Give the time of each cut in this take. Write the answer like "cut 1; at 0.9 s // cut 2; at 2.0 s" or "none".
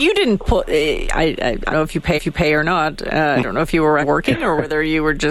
cut 1; at 1.7 s // cut 2; at 2.2 s // cut 3; at 4.0 s